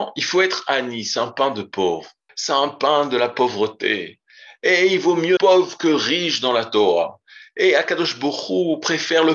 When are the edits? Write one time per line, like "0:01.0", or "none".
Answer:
0:02.3
0:05.4